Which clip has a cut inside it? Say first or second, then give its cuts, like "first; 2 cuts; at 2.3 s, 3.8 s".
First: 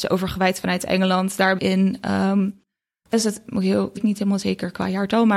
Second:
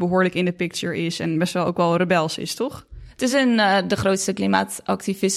first; 3 cuts; at 1.6 s, 3.1 s, 4.0 s